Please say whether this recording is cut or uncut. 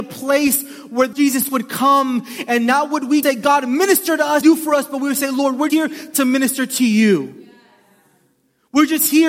cut